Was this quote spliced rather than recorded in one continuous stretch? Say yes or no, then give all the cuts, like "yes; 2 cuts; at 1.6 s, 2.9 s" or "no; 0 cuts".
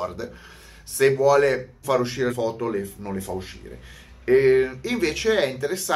yes; 2 cuts; at 1.8 s, 2.3 s